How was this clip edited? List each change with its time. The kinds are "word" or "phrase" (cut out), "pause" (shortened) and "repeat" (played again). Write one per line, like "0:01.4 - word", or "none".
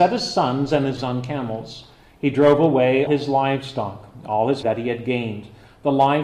0:01.0 - word
0:03.1 - word
0:04.6 - word